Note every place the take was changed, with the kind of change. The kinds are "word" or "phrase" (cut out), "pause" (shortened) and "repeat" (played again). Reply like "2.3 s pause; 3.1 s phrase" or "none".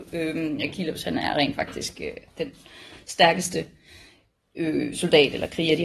none